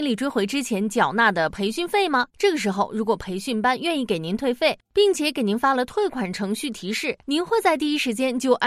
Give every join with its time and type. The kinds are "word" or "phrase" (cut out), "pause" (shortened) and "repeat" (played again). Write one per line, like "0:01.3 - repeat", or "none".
0:02.3 - pause
0:07.2 - pause